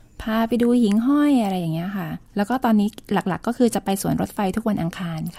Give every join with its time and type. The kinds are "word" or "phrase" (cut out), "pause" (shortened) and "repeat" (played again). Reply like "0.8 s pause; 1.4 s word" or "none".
2.3 s pause